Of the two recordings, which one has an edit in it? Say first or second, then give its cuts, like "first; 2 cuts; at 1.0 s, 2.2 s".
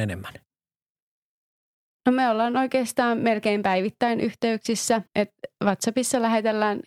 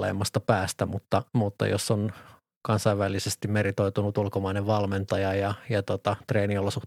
first; 1 cut; at 5.1 s